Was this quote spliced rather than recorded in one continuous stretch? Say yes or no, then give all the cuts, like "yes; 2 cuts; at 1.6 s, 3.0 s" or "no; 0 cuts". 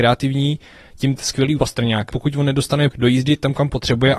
yes; 4 cuts; at 1.2 s, 1.6 s, 2.1 s, 2.9 s